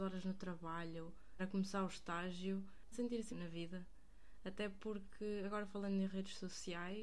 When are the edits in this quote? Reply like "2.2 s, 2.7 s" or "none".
1.4 s, 2.9 s, 3.3 s